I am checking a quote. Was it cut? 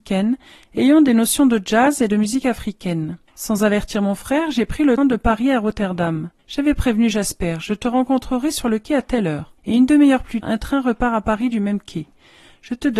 yes; 5 cuts; at 3.3 s, 5.0 s, 6.4 s, 9.6 s, 10.4 s

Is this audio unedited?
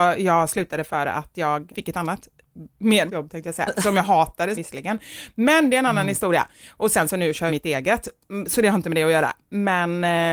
no; 4 cuts; at 1.7 s, 3.1 s, 4.5 s, 7.5 s

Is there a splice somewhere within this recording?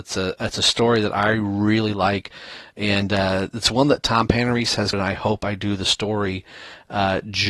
yes; 1 cut; at 4.9 s

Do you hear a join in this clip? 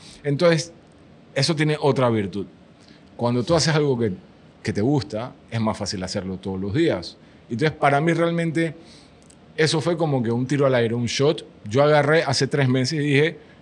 no; 0 cuts

